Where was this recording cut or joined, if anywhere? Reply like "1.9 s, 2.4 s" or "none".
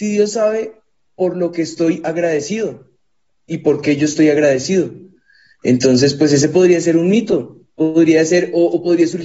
none